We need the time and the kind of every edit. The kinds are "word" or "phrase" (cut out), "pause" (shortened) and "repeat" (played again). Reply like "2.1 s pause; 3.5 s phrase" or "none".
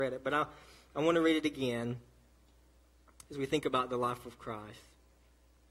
none